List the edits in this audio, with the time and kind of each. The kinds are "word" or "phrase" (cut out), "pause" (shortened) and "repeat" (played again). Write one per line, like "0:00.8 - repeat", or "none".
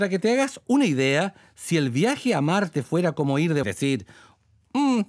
0:03.6 - phrase